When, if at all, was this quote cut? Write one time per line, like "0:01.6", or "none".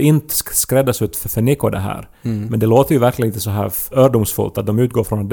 none